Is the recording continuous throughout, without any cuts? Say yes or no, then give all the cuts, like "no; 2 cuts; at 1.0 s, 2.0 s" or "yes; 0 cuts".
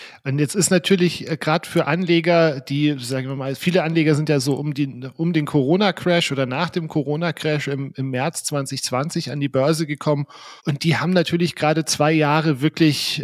no; 1 cut; at 10.6 s